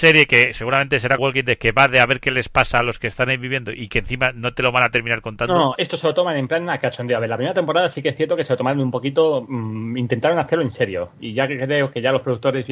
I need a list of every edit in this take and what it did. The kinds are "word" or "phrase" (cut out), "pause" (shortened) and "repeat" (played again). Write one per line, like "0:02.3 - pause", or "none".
0:01.2 - word
0:05.8 - word